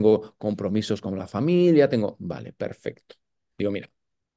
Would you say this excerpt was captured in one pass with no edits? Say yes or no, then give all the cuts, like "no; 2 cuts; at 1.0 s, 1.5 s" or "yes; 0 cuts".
yes; 0 cuts